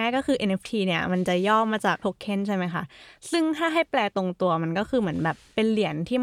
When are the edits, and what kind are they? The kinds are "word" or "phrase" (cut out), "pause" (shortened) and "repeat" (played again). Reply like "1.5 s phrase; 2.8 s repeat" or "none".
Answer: 2.0 s word